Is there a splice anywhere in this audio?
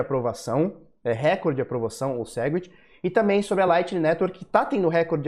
no; 0 cuts

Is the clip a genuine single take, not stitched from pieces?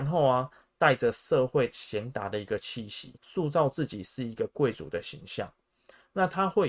no; 1 cut; at 3.2 s

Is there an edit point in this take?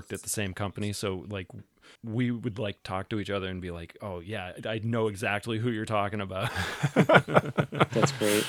no; 0 cuts

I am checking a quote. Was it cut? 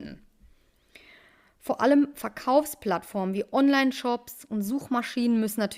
no; 0 cuts

